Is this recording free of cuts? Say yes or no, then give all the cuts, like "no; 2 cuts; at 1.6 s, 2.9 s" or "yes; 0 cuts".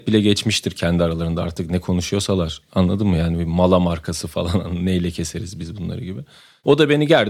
yes; 0 cuts